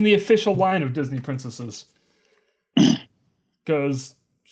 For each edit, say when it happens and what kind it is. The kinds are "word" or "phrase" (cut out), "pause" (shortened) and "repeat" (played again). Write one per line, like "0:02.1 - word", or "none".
none